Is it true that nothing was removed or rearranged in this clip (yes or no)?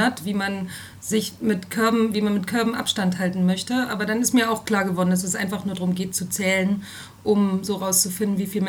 yes